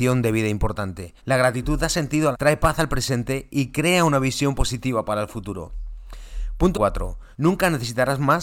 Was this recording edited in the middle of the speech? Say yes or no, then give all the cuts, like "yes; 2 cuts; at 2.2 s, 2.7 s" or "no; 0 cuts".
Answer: yes; 4 cuts; at 1.2 s, 2.3 s, 6.7 s, 7.3 s